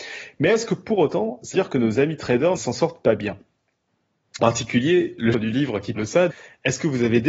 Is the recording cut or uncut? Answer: cut